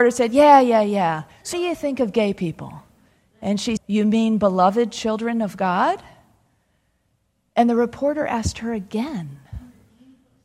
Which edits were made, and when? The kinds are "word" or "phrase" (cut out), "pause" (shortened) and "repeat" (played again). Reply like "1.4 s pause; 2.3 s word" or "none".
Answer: 1.5 s word; 3.8 s word